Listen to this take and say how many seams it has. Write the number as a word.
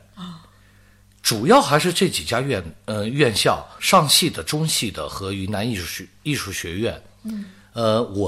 one